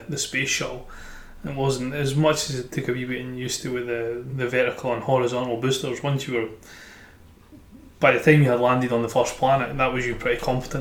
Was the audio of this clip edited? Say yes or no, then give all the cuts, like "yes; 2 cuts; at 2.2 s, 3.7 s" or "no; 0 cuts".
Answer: no; 0 cuts